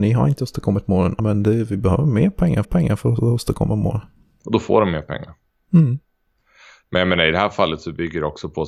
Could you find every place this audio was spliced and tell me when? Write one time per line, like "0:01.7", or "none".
0:01.2
0:02.6